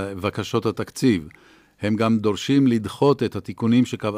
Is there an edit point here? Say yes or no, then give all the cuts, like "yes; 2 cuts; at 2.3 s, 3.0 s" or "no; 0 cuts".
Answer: no; 0 cuts